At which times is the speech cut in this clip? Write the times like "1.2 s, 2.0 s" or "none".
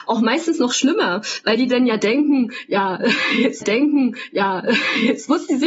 3.6 s